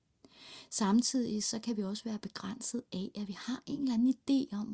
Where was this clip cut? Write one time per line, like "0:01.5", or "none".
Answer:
none